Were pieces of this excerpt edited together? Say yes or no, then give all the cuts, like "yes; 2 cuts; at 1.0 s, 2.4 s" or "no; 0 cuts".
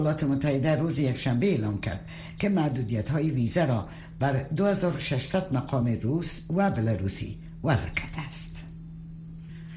no; 0 cuts